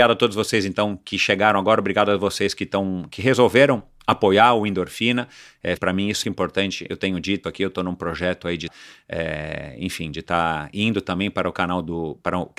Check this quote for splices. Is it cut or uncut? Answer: cut